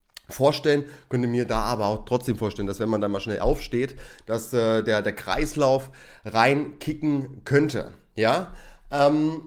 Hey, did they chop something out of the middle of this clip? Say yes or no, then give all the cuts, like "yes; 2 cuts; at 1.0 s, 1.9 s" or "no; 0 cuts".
no; 0 cuts